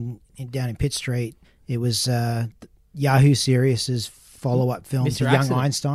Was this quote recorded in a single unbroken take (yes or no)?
no